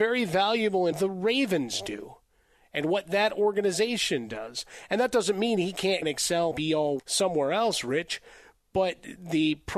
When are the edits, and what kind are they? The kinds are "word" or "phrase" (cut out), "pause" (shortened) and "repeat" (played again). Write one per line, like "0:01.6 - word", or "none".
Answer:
0:00.9 - word
0:06.0 - word
0:06.5 - word
0:07.0 - word